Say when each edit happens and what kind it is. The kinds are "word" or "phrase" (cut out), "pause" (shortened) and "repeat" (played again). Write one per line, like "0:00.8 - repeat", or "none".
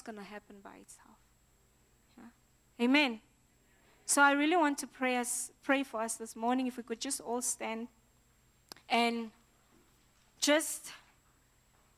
0:08.8 - pause